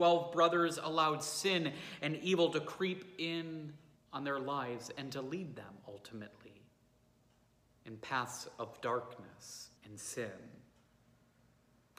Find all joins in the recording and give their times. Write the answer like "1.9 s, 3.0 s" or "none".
4.0 s, 9.8 s